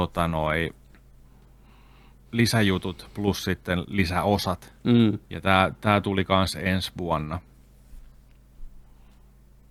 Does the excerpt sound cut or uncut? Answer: cut